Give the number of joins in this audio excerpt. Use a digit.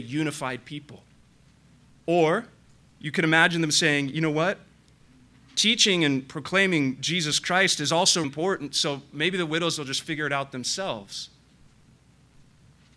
1